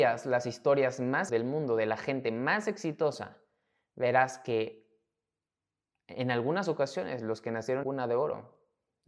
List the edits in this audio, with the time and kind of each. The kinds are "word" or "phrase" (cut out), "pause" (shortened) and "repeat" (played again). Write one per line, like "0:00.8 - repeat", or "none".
0:01.3 - word
0:07.8 - word

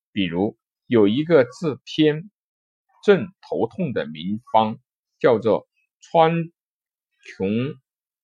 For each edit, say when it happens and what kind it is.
none

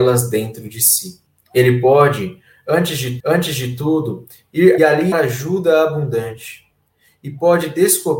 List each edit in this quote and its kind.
0:01.3 - pause
0:03.2 - repeat
0:04.8 - phrase
0:05.1 - word

